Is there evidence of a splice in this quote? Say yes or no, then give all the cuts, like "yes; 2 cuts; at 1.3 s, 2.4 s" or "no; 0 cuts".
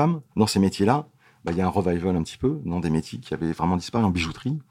no; 0 cuts